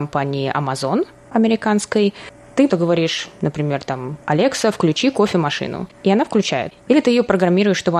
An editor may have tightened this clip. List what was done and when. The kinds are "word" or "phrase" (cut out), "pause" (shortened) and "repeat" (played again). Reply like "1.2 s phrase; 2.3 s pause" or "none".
2.7 s word; 4.2 s pause

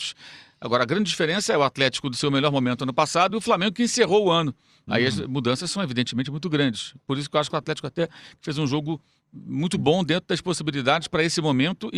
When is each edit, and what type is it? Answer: none

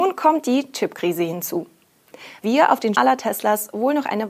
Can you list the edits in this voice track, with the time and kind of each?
2.4 s word; 2.9 s word

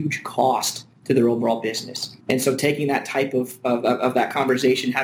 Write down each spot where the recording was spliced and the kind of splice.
2.2 s pause

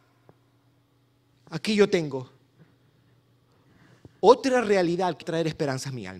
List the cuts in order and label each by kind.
5.2 s word

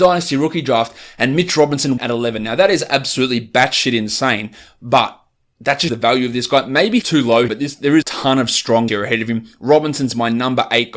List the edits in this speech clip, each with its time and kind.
2.0 s word; 5.9 s word; 7.0 s word; 7.5 s word; 8.0 s word; 8.9 s word

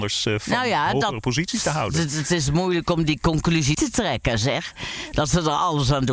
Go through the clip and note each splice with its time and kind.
3.7 s word

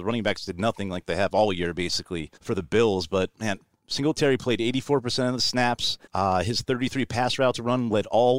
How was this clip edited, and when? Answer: 2.4 s pause; 6.1 s pause

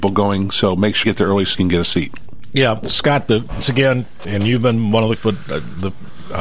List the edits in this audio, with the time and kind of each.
1.0 s word; 1.5 s word; 2.8 s word; 3.6 s word; 4.2 s word; 5.2 s word

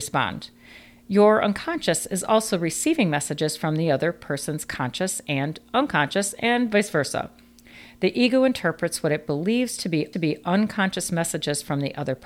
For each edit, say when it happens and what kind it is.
10.1 s repeat

